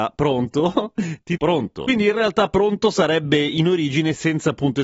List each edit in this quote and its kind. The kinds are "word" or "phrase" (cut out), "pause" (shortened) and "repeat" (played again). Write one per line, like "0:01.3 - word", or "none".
0:01.4 - word